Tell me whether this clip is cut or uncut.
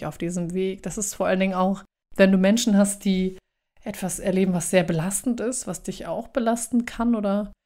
uncut